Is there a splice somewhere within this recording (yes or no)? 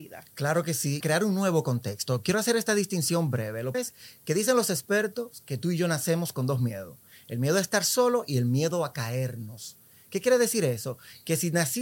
yes